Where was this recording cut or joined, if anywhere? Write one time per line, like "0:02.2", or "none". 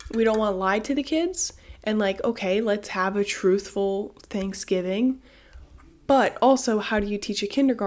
none